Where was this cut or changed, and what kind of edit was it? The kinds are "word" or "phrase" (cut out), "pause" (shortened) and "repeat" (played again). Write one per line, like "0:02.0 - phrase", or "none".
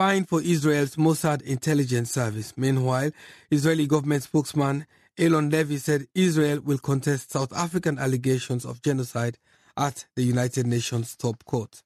none